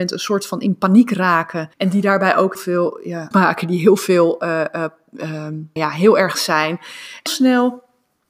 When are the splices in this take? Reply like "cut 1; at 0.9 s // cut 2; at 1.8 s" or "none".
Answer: cut 1; at 1.7 s // cut 2; at 2.6 s // cut 3; at 3.3 s // cut 4; at 5.8 s // cut 5; at 6.4 s // cut 6; at 7.3 s